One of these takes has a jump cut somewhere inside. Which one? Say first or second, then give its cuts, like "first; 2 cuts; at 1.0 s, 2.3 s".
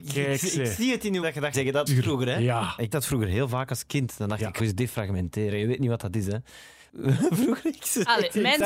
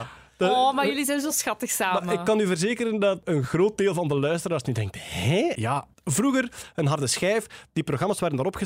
first; 5 cuts; at 1.2 s, 1.5 s, 1.9 s, 2.9 s, 4.6 s